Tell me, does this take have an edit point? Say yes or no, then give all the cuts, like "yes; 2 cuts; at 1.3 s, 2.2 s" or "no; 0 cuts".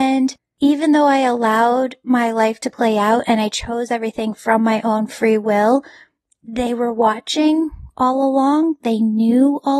no; 0 cuts